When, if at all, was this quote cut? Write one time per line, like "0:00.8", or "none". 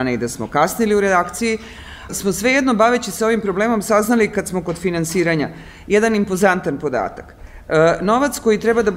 0:02.1